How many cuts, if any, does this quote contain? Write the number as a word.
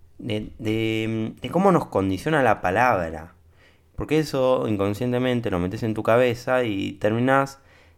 zero